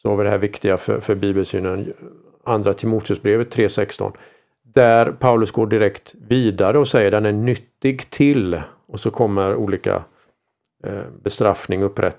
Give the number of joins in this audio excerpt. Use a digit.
0